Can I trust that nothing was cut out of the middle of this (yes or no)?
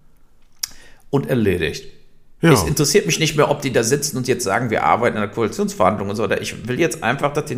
yes